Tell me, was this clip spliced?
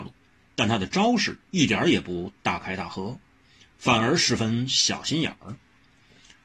yes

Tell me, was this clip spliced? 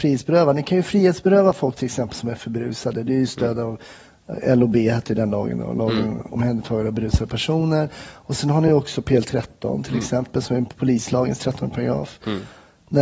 no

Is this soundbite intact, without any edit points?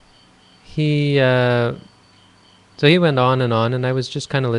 no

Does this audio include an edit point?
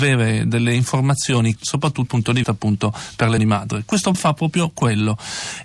yes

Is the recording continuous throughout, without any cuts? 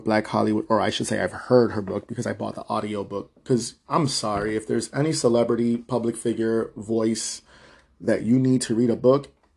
yes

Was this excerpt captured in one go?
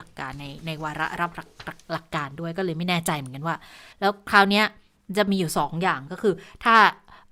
no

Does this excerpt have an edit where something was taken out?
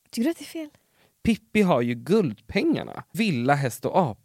yes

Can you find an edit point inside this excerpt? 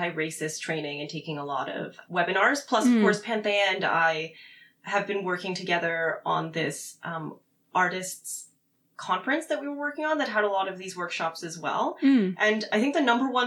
yes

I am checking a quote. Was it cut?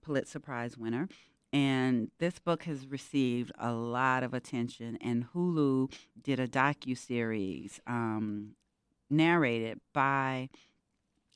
no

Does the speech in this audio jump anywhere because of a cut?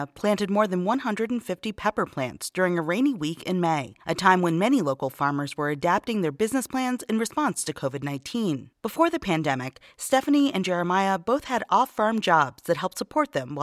yes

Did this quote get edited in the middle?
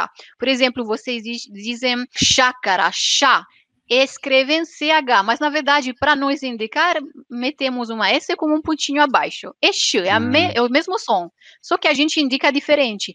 no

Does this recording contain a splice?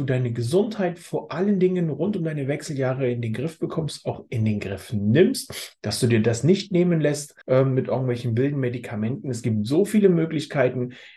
yes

